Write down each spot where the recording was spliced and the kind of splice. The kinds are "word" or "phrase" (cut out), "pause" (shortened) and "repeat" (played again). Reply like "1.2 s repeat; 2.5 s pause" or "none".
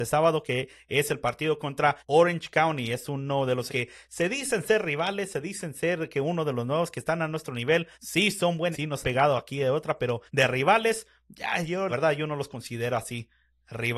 2.0 s pause; 3.7 s word; 7.9 s pause; 8.7 s word; 9.0 s word; 10.3 s pause; 11.9 s word